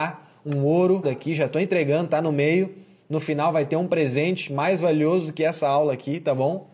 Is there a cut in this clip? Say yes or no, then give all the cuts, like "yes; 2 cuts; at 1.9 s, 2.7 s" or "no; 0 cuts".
yes; 1 cut; at 1.0 s